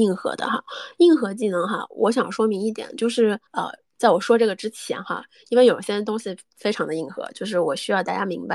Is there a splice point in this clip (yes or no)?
yes